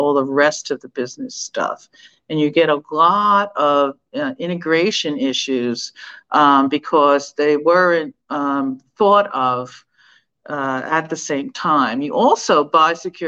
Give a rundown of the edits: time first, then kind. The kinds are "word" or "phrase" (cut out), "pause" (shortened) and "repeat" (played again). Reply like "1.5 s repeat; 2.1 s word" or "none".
8.2 s pause